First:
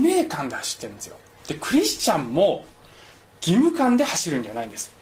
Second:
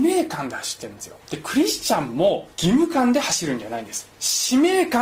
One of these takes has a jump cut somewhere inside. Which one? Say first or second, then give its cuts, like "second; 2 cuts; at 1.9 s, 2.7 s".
second; 3 cuts; at 1.2 s, 2.5 s, 4.1 s